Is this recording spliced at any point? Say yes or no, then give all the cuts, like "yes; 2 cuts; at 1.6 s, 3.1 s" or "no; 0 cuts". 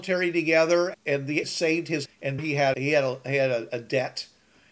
yes; 5 cuts; at 0.9 s, 1.4 s, 2.1 s, 2.4 s, 2.7 s